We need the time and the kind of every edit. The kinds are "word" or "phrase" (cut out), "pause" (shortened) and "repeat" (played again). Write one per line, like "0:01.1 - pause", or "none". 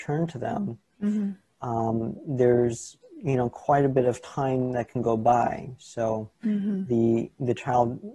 none